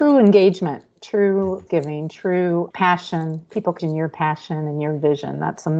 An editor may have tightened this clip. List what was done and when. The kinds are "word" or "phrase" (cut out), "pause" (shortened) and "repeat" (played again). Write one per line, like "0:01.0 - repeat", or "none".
0:01.7 - word
0:02.7 - word
0:03.8 - word